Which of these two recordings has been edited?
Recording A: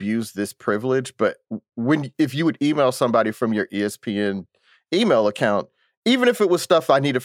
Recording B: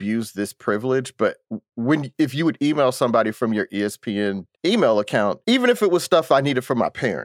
B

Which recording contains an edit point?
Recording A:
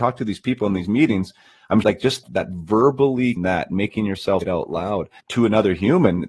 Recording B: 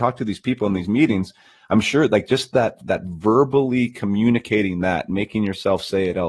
A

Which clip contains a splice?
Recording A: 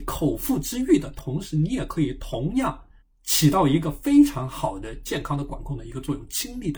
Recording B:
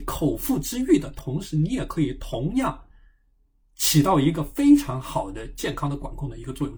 A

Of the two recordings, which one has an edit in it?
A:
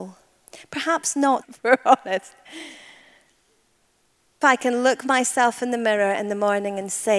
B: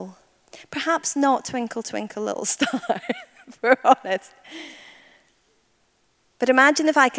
A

